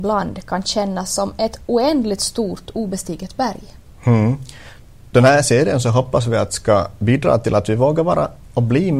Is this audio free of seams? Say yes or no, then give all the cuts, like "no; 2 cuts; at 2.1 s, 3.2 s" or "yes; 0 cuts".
yes; 0 cuts